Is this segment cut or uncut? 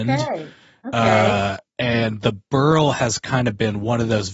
uncut